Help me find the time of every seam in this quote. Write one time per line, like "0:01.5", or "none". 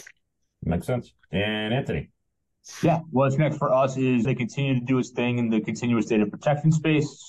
0:04.2